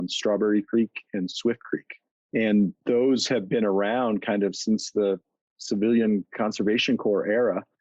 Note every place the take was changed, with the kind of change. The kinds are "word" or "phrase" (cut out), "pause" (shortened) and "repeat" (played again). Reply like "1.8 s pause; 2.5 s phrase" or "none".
none